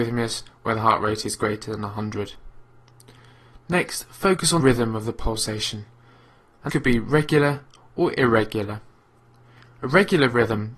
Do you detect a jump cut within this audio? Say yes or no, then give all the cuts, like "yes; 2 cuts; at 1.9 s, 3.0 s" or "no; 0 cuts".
yes; 2 cuts; at 4.6 s, 6.7 s